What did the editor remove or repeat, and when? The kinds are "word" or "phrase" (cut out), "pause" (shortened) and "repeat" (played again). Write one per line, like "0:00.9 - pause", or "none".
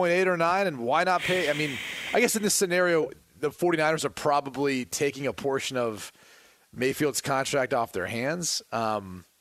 none